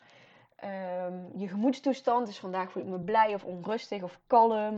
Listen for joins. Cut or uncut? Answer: uncut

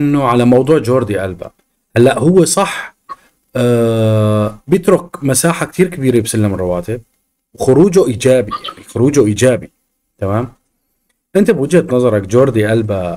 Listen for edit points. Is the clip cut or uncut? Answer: uncut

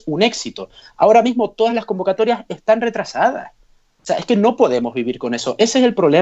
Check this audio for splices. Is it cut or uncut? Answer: uncut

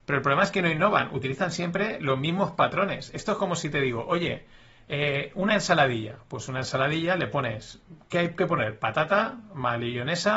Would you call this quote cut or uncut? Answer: uncut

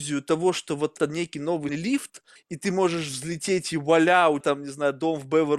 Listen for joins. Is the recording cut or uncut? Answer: cut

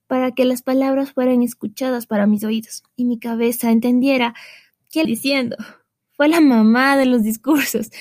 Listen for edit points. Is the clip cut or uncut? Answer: cut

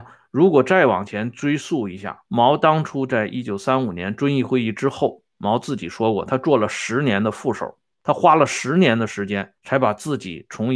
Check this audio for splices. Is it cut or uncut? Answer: cut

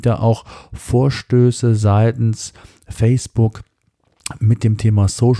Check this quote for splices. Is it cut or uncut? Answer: uncut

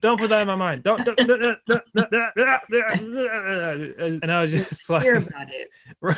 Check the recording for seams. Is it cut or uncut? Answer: uncut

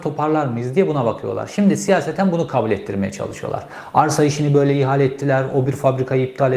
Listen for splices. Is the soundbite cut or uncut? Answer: uncut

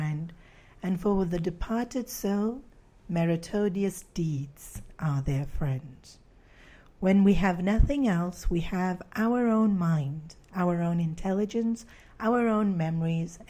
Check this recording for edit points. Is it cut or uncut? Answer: uncut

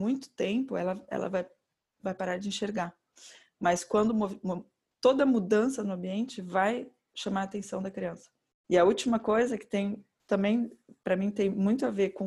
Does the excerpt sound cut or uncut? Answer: uncut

